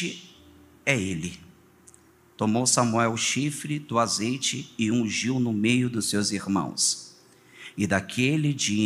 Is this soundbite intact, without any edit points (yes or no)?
yes